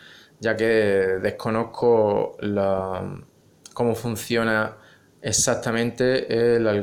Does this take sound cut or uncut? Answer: uncut